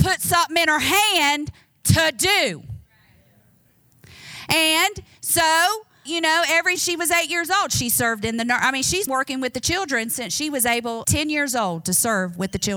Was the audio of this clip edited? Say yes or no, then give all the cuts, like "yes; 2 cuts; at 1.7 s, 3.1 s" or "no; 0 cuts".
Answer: yes; 4 cuts; at 6.1 s, 6.8 s, 9.1 s, 11.0 s